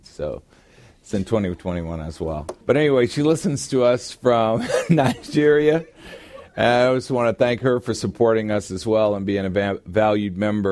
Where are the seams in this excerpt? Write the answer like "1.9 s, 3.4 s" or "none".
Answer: 2.6 s